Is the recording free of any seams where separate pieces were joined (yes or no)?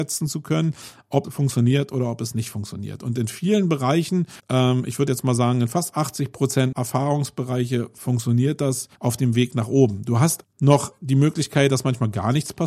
no